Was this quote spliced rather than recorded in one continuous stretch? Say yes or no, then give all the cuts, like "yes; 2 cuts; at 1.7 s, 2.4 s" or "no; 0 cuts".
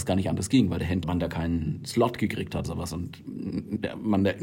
yes; 2 cuts; at 1.0 s, 2.6 s